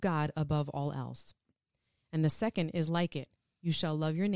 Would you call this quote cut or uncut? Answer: uncut